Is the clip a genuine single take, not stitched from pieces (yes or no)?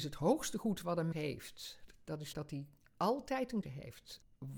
no